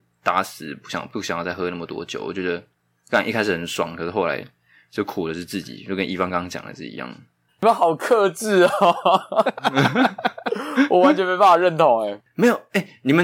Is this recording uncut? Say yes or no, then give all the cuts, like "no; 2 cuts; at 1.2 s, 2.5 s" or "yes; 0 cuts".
yes; 0 cuts